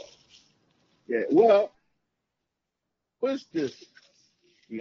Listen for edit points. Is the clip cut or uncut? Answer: cut